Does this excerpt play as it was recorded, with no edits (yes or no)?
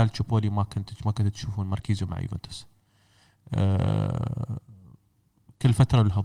yes